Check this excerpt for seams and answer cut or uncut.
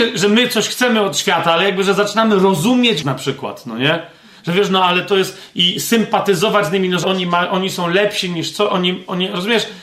cut